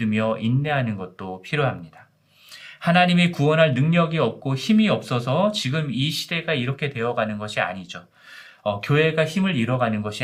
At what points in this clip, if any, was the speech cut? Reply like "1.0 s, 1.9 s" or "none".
none

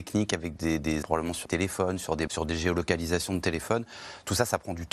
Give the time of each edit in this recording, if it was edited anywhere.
1.0 s, 1.5 s, 2.3 s

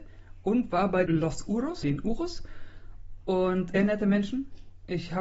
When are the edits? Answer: 1.1 s, 1.8 s, 3.7 s

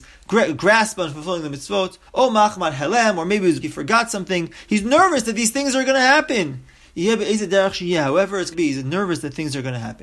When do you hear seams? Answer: 2.1 s, 3.6 s, 8.5 s

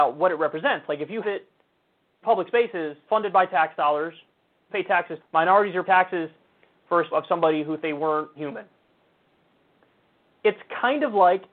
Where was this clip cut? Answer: 1.2 s, 2.2 s, 3.1 s, 4.7 s, 5.2 s, 5.8 s, 7.1 s, 7.8 s, 8.4 s

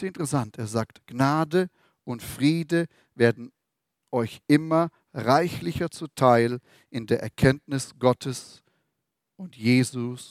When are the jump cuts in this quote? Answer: none

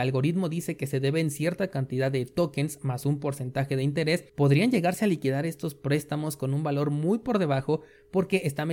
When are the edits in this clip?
4.3 s

